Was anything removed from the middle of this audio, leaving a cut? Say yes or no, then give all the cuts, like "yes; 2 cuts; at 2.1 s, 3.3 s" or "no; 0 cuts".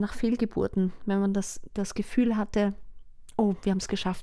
no; 0 cuts